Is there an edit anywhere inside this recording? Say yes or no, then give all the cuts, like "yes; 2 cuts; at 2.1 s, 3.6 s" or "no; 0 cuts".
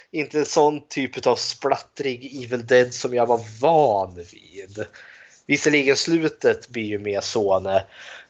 no; 0 cuts